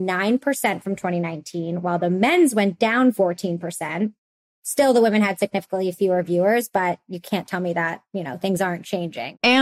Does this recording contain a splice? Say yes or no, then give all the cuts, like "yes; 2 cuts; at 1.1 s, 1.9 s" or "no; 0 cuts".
no; 0 cuts